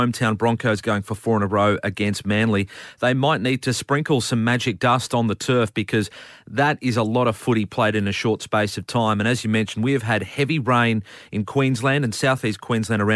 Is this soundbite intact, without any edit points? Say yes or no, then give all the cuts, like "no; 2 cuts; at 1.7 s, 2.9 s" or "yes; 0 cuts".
yes; 0 cuts